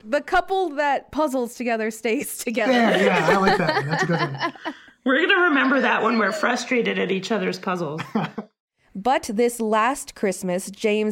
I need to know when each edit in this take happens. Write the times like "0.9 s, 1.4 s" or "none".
none